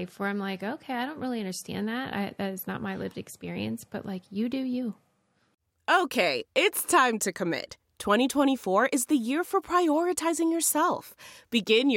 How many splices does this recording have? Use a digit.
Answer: 0